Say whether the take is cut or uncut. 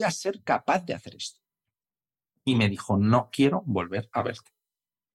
uncut